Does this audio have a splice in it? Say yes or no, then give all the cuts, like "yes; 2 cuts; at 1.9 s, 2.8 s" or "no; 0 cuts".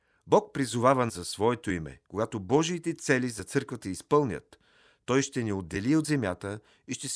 yes; 3 cuts; at 1.1 s, 2.1 s, 3.8 s